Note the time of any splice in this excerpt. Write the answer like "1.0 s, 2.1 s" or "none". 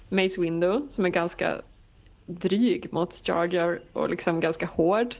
none